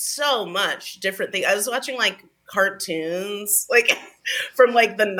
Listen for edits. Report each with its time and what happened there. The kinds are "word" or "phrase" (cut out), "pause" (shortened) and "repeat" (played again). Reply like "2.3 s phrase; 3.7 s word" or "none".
none